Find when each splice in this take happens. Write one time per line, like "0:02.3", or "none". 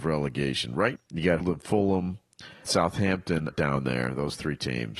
0:01.0
0:01.4
0:02.6
0:03.5